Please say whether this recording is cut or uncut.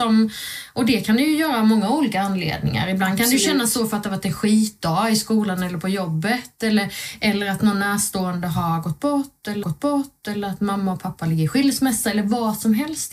cut